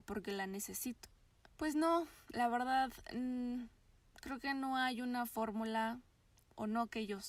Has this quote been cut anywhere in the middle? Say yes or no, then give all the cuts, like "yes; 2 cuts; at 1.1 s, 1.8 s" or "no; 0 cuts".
no; 0 cuts